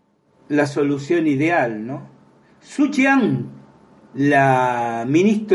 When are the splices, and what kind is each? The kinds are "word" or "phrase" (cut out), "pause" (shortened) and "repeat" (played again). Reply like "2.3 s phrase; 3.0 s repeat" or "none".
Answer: none